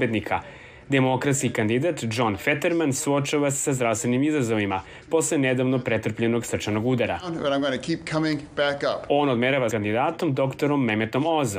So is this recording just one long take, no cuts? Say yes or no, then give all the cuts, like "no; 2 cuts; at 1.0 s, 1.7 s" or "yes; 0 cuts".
no; 1 cut; at 9.7 s